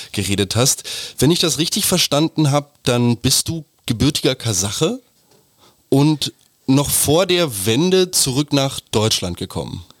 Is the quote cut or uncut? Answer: uncut